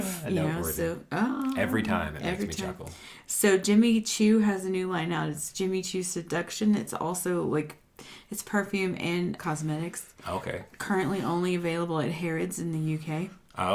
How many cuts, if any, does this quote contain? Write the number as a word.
one